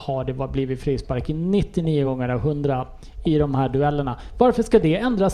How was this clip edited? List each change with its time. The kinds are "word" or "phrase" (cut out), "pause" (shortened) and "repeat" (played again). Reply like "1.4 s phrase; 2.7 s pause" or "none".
none